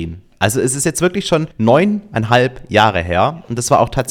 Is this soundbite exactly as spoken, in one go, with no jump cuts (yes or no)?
no